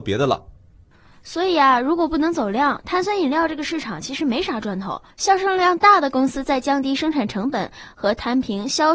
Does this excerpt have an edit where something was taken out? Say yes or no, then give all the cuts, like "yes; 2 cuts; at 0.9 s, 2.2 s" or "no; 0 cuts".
yes; 1 cut; at 5.1 s